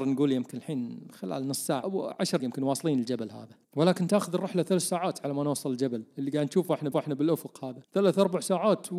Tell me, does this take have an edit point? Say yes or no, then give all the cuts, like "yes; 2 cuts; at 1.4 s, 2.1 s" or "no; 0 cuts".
yes; 5 cuts; at 1.8 s, 2.4 s, 3.6 s, 6.9 s, 7.8 s